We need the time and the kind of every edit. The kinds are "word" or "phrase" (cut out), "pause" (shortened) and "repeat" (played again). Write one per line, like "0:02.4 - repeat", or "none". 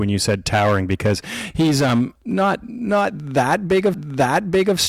0:02.2 - word
0:03.9 - repeat